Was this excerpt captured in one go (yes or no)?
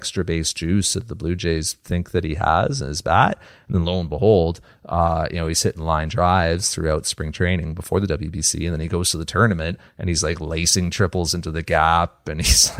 yes